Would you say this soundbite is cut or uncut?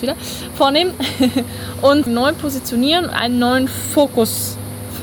cut